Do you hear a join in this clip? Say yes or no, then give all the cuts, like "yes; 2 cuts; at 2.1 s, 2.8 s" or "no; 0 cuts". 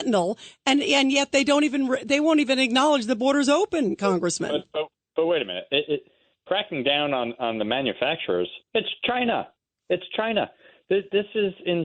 no; 0 cuts